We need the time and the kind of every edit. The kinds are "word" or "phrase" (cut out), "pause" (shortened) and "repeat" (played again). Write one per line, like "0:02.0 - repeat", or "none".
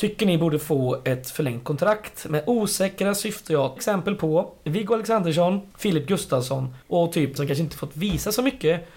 0:03.8 - word
0:05.7 - pause
0:06.8 - pause
0:07.4 - word